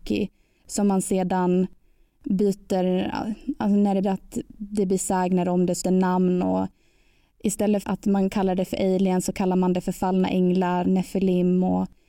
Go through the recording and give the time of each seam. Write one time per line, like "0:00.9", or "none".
0:04.0
0:05.8
0:07.8
0:10.8